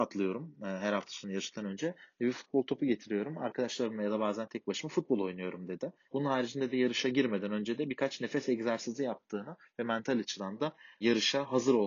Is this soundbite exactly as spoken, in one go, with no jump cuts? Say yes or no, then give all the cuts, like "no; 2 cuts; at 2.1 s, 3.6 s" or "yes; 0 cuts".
yes; 0 cuts